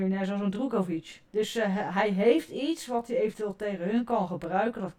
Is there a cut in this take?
yes; 1 cut; at 1.3 s

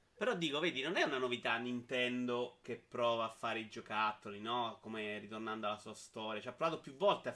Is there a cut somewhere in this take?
no; 0 cuts

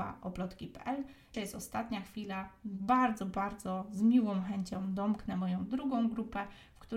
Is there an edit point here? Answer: yes; 1 cut; at 1.3 s

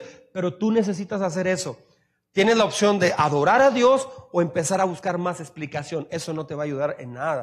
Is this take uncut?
yes; 0 cuts

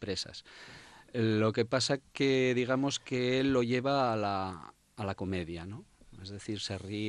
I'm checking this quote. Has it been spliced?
no; 0 cuts

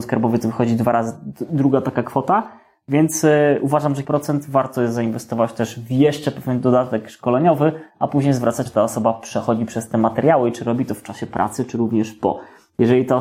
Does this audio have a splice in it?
yes; 2 cuts; at 4.0 s, 8.7 s

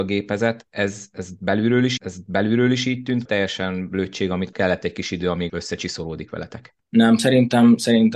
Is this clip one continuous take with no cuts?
no; 5 cuts; at 2.0 s, 3.3 s, 4.5 s, 5.5 s, 6.8 s

